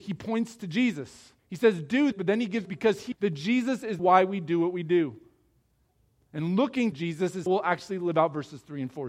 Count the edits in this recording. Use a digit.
7